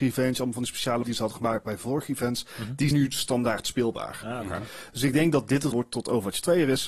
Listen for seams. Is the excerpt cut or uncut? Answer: cut